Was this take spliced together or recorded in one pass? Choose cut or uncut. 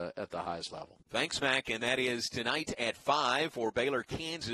cut